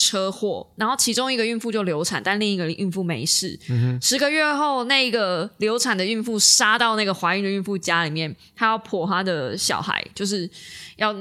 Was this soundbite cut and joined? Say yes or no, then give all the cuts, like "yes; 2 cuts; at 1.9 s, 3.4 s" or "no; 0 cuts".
no; 0 cuts